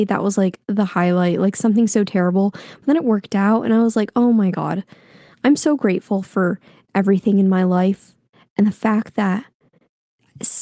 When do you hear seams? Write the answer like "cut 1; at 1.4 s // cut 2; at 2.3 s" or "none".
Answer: none